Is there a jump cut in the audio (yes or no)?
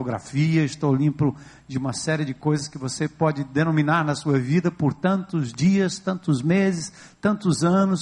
no